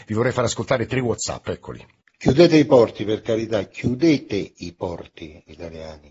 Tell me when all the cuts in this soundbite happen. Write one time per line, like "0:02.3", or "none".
none